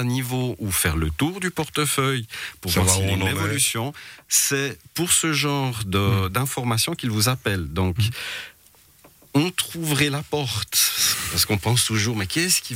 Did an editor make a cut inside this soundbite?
no; 0 cuts

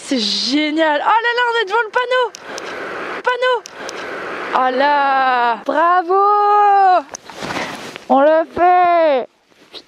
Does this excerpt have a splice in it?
yes; 2 cuts; at 3.2 s, 4.7 s

